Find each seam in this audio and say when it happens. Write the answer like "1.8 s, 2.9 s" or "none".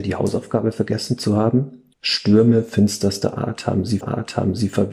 1.9 s, 4.0 s